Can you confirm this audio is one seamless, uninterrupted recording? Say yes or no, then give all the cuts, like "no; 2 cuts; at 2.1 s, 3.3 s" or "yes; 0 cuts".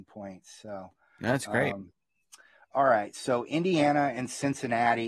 yes; 0 cuts